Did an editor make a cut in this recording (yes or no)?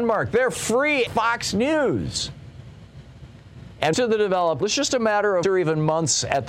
yes